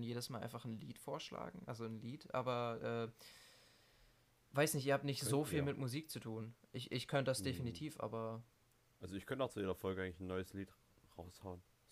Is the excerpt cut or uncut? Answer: uncut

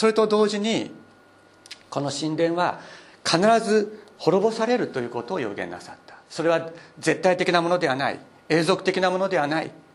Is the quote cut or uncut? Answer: cut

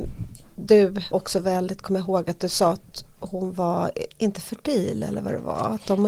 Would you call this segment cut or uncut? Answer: cut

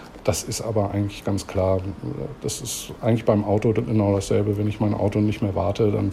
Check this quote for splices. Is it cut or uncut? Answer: uncut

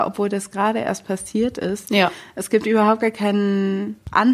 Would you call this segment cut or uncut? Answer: uncut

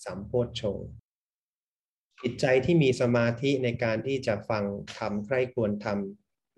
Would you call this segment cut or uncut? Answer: uncut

